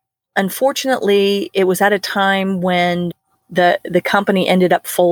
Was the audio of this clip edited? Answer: no; 0 cuts

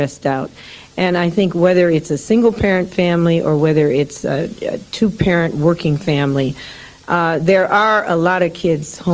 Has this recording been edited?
no; 0 cuts

